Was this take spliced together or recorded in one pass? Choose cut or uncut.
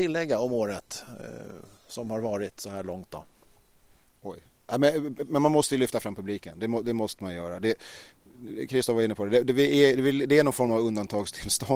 uncut